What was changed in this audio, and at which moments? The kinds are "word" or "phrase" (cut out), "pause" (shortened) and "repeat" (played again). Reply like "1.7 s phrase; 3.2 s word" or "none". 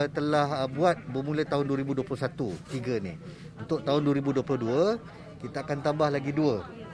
none

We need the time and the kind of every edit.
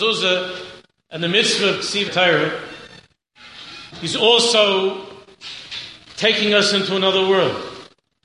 2.1 s word; 3.9 s pause

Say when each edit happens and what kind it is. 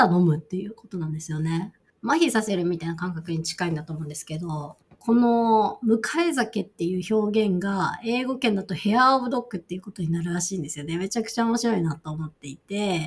1.9 s pause; 4.8 s pause

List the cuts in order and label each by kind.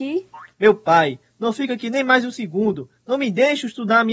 none

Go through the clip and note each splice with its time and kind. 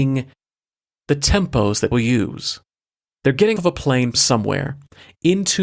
1.9 s word; 3.1 s pause; 3.6 s word; 4.1 s word

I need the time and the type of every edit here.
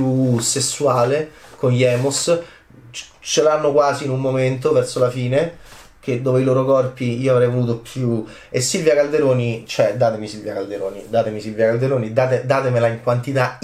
none

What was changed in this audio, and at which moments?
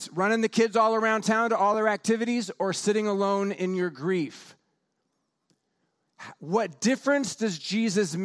none

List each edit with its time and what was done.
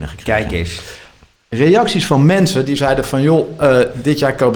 none

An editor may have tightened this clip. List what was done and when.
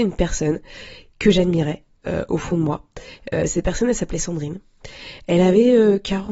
none

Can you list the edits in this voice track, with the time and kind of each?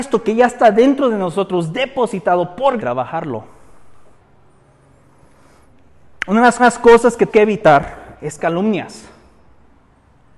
2.8 s phrase; 6.6 s repeat; 7.3 s word

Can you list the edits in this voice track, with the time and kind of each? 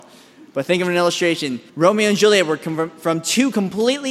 1.7 s pause

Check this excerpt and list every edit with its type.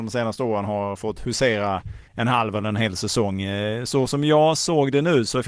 2.1 s pause

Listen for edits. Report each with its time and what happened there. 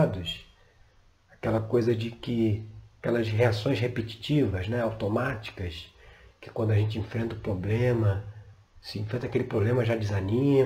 none

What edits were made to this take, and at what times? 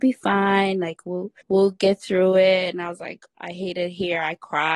1.4 s pause

